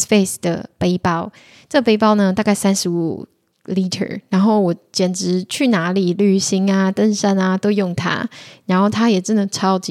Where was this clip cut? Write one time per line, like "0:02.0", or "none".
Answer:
none